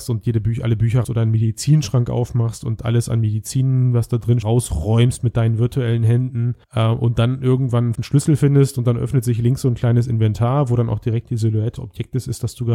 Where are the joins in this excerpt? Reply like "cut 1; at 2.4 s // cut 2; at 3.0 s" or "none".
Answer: cut 1; at 1.0 s // cut 2; at 4.4 s // cut 3; at 6.6 s // cut 4; at 7.9 s // cut 5; at 11.8 s